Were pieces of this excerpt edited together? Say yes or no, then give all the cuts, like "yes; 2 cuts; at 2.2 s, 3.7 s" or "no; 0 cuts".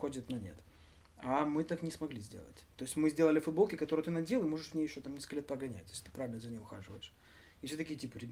no; 0 cuts